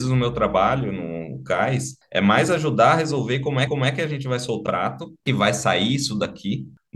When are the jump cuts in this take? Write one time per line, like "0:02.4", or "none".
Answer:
0:03.7
0:04.7
0:05.3